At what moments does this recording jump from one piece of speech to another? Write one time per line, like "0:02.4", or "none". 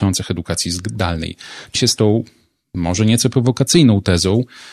0:01.8